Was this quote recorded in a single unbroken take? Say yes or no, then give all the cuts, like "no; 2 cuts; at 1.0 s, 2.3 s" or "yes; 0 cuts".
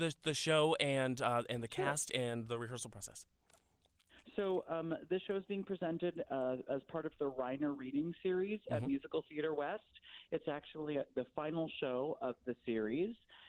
yes; 0 cuts